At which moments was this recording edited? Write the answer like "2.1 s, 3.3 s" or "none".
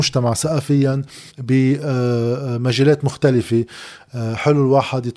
1.3 s